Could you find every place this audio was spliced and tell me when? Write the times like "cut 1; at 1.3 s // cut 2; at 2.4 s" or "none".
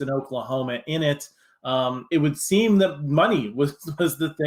cut 1; at 2.1 s